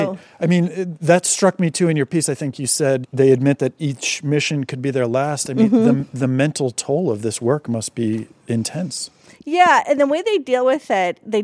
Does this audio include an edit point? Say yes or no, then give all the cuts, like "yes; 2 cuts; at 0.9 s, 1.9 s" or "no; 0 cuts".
no; 0 cuts